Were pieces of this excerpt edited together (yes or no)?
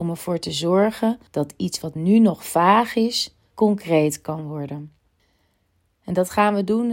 yes